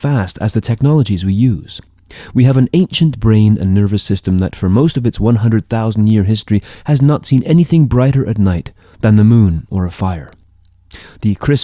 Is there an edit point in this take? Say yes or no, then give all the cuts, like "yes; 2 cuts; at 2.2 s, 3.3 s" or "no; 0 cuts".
no; 0 cuts